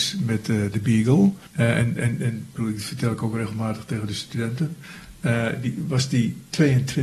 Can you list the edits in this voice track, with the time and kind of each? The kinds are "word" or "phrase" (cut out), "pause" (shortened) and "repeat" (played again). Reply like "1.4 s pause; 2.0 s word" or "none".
1.5 s pause